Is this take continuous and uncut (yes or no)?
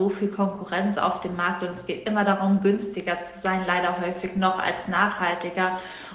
yes